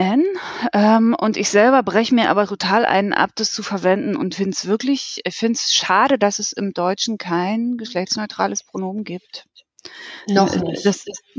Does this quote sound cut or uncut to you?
uncut